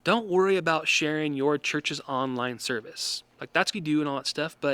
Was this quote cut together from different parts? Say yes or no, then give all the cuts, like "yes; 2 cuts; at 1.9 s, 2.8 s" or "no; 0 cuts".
yes; 1 cut; at 3.7 s